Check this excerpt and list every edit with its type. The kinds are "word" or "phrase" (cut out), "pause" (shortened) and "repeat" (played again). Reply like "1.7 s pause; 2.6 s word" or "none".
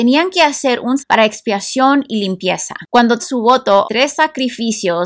1.0 s word; 3.2 s word; 3.8 s word